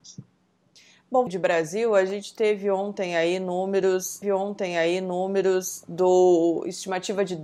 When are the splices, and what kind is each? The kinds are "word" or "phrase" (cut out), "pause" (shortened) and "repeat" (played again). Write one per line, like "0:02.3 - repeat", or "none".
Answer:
0:01.3 - phrase
0:04.2 - repeat